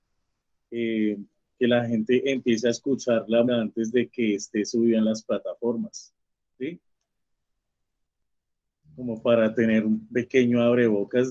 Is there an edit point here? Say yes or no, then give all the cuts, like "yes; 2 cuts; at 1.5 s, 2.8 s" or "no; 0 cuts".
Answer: yes; 1 cut; at 3.5 s